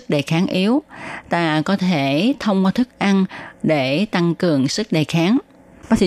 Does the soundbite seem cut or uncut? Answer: uncut